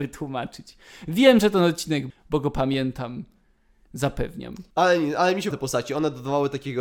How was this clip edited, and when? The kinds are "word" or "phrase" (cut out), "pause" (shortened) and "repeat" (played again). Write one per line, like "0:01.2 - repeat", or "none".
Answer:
0:02.1 - word
0:04.7 - pause
0:05.5 - word